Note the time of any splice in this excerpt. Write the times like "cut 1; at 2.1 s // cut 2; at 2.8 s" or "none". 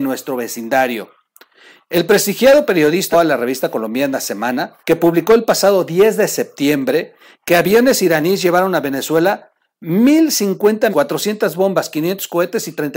cut 1; at 3.1 s // cut 2; at 4.8 s // cut 3; at 10.9 s